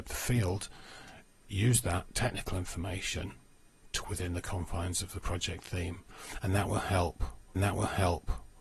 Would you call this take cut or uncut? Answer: cut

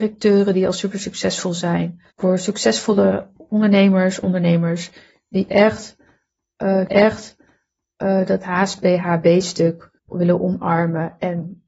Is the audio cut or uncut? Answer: cut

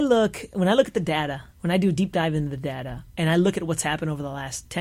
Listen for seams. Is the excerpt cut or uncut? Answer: uncut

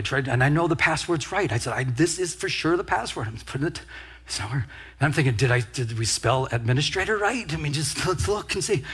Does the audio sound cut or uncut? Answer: uncut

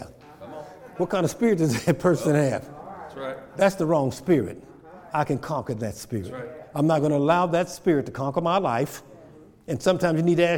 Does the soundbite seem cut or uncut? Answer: uncut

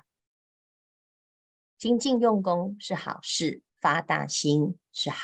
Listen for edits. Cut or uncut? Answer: cut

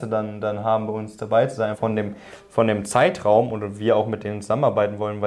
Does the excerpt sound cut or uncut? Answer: cut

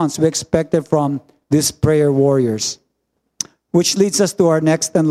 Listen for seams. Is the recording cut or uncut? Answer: uncut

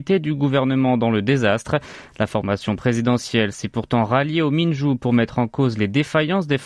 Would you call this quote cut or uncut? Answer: uncut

